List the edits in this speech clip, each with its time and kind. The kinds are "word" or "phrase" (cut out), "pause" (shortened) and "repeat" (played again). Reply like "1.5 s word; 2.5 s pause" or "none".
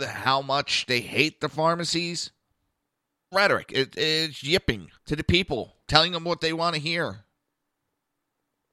3.3 s phrase; 5.0 s pause; 5.8 s pause